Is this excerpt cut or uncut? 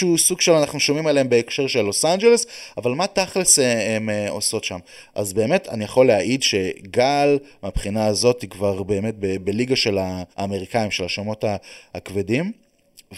cut